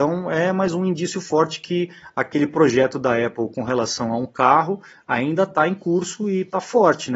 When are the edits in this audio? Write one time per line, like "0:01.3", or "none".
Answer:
none